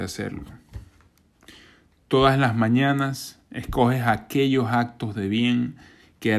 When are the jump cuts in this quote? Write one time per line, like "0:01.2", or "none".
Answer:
none

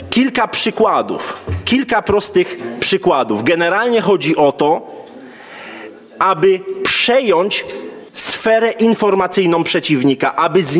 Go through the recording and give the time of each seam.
0:08.1

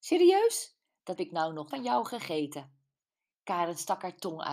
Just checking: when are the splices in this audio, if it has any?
0:01.2
0:01.7

